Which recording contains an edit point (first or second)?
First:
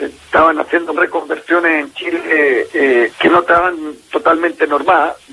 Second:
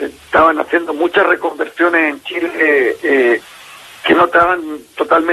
first